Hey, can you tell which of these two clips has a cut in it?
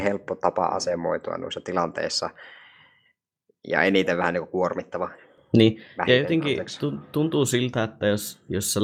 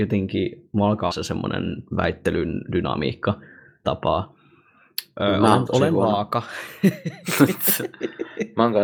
second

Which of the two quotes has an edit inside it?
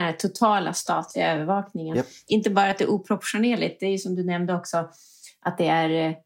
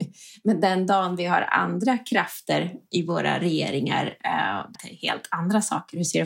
second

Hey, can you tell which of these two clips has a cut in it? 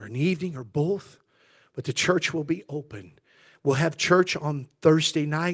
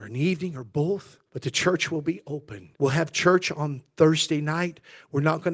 second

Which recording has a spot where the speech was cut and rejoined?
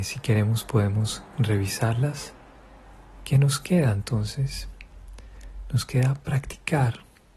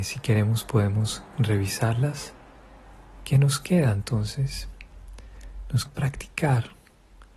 second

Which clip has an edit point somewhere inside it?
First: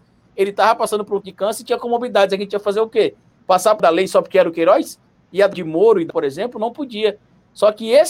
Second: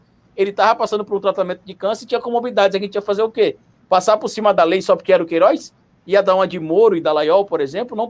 first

